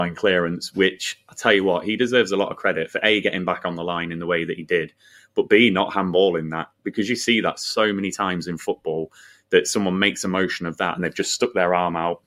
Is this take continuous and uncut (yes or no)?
yes